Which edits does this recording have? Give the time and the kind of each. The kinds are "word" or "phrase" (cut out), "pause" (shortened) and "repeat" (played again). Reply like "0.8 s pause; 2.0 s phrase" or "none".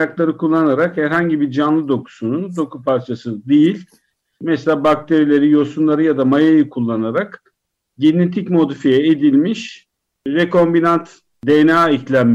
none